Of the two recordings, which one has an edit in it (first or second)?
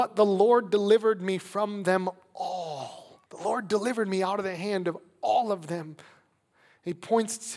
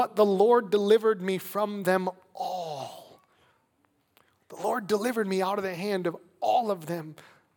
first